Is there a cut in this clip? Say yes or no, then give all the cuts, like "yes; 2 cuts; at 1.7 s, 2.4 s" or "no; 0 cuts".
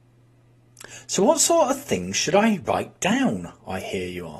no; 0 cuts